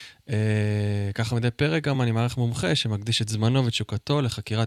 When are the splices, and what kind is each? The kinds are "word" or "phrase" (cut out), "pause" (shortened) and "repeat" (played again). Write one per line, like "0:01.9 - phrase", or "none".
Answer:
none